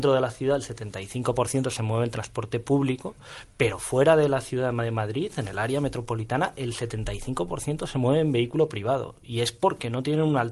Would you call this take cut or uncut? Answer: uncut